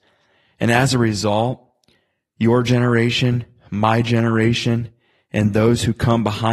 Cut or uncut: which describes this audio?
uncut